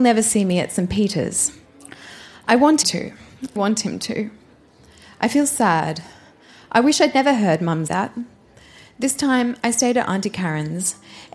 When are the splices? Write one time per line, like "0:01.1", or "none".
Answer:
0:02.8
0:03.6
0:07.9